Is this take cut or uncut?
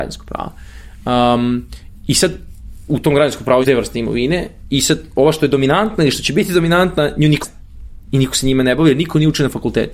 cut